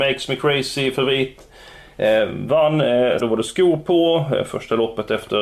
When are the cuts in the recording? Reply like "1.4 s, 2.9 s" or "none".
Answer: 3.2 s